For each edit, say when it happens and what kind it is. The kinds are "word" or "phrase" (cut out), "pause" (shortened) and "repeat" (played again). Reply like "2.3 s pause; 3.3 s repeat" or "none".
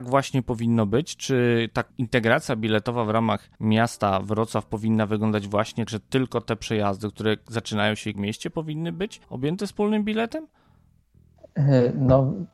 1.9 s pause; 3.5 s pause; 5.9 s word; 8.1 s word; 9.2 s pause